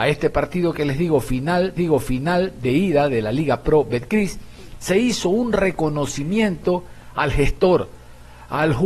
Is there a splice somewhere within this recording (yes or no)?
yes